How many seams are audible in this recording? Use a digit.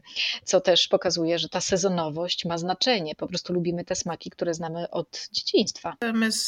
0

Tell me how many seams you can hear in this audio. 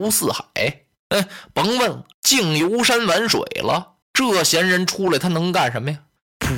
2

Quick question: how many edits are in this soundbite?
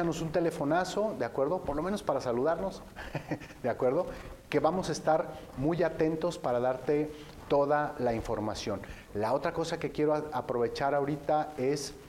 0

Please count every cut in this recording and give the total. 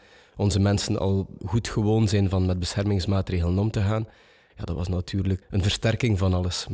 2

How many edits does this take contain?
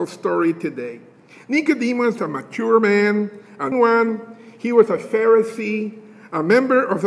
2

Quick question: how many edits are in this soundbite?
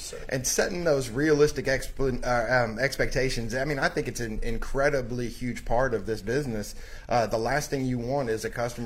0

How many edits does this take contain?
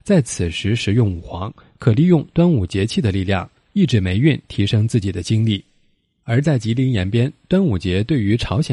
0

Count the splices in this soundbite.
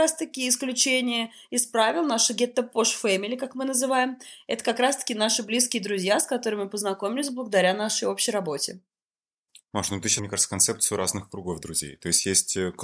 1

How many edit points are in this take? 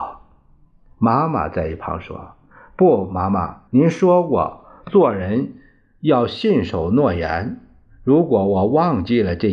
1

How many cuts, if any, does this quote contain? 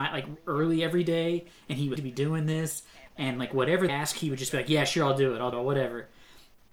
3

